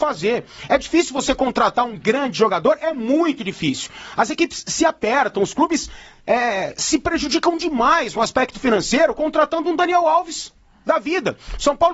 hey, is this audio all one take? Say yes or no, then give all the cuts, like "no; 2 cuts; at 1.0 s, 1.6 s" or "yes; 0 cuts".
yes; 0 cuts